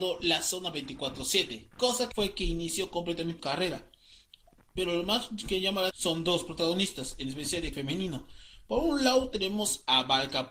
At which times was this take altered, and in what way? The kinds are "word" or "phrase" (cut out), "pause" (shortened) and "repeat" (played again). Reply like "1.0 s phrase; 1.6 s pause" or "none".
2.1 s word; 3.4 s word; 5.9 s word; 7.7 s word